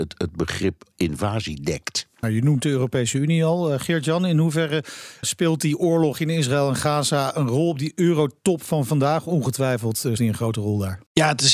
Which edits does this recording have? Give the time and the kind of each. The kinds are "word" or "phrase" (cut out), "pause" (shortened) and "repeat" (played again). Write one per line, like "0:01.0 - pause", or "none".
0:02.2 - word
0:05.2 - word
0:10.2 - word